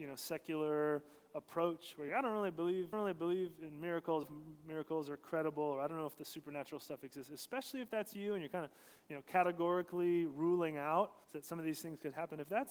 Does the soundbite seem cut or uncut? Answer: cut